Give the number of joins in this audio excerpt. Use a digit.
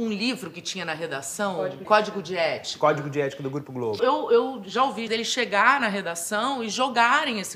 3